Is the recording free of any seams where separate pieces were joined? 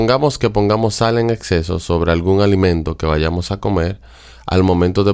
yes; 0 cuts

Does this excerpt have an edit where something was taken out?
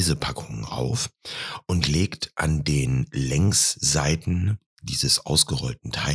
no; 0 cuts

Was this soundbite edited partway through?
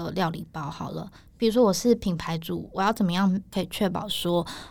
no; 0 cuts

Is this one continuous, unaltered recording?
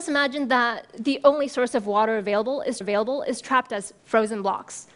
no; 1 cut; at 2.8 s

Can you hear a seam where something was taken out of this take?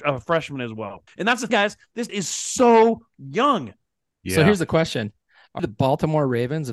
yes; 4 cuts; at 1.1 s, 1.5 s, 2.1 s, 5.6 s

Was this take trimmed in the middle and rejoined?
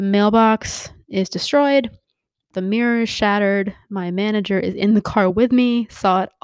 no; 0 cuts

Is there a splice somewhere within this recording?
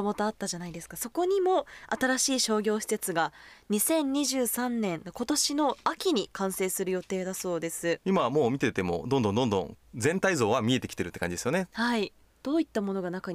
no; 0 cuts

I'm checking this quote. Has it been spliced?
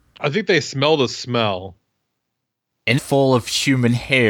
yes; 1 cut; at 3.0 s

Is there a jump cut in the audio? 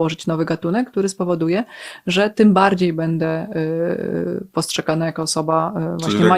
no; 0 cuts

